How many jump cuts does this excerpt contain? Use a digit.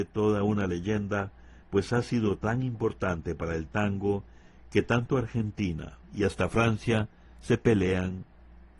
2